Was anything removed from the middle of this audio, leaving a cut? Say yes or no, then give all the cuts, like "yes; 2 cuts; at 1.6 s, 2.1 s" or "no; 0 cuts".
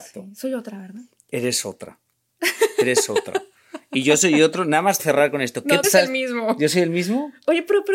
yes; 2 cuts; at 5.0 s, 5.8 s